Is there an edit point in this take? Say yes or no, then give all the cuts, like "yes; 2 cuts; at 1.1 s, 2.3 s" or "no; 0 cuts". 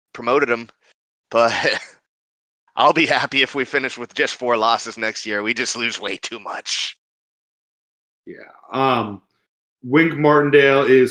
no; 0 cuts